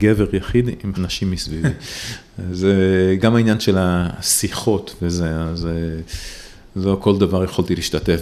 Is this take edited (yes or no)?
yes